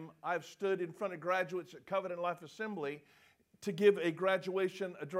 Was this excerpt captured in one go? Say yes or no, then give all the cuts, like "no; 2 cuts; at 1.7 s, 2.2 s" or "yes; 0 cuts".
yes; 0 cuts